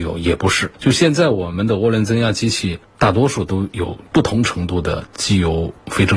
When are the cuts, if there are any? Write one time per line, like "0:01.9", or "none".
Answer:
0:04.1